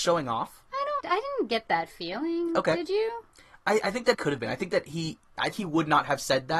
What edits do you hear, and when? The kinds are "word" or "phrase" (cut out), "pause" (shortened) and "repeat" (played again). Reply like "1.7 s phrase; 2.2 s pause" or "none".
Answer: 1.0 s word; 4.1 s word; 5.5 s word